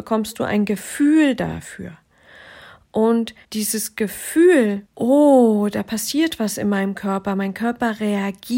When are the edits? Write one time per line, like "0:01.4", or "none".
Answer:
0:03.4
0:04.9